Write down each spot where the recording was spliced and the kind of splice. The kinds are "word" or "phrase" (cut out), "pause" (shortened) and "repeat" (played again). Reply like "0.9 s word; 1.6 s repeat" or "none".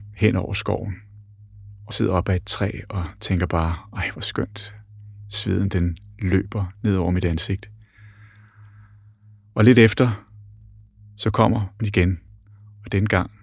1.9 s word; 11.8 s word